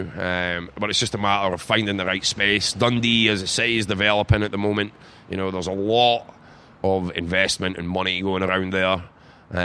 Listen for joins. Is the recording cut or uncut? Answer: uncut